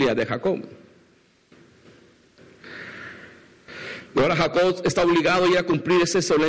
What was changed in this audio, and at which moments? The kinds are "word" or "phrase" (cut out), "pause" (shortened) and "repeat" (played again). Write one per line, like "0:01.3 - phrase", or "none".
none